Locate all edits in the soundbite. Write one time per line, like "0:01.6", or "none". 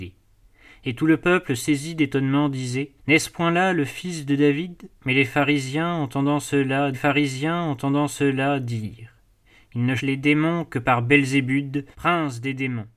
0:03.0
0:05.0
0:06.9
0:10.0
0:11.9